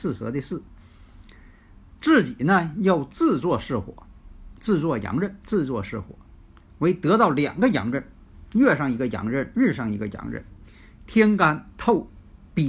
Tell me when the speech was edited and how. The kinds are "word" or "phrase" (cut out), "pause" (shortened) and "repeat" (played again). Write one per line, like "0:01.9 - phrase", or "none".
none